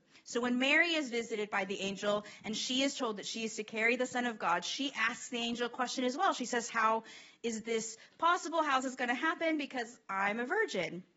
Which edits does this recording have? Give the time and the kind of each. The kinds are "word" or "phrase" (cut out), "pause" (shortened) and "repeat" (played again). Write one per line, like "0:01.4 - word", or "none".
none